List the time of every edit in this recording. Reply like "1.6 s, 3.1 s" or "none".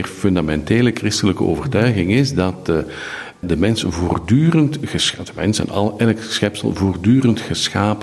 none